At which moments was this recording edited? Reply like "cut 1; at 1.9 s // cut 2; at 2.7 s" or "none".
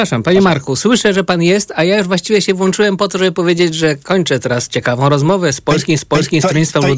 cut 1; at 6.0 s